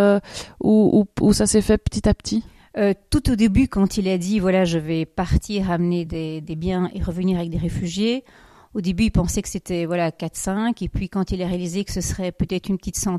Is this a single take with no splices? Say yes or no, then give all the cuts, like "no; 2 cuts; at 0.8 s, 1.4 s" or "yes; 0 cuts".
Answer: yes; 0 cuts